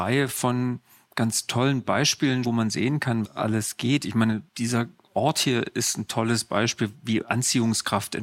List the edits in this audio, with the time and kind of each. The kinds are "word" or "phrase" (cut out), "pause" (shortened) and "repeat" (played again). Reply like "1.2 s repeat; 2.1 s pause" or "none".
2.4 s word; 3.3 s word; 4.5 s pause